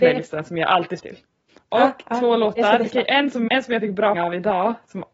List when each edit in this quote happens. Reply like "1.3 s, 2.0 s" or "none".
1.0 s, 3.5 s, 4.1 s